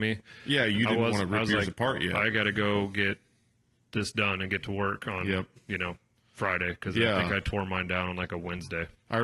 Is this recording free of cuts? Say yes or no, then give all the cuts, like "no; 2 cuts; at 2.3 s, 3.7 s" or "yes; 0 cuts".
yes; 0 cuts